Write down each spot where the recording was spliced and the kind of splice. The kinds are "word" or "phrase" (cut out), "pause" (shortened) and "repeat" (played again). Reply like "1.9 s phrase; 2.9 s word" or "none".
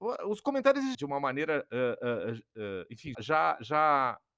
0.9 s word; 3.1 s word